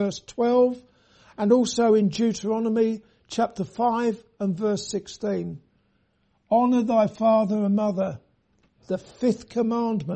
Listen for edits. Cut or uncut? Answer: uncut